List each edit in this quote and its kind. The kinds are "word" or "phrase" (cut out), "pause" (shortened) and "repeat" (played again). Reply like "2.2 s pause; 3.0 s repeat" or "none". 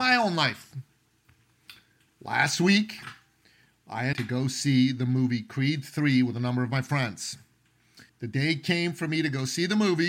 4.1 s word; 8.1 s pause